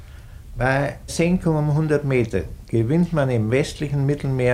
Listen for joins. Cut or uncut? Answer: cut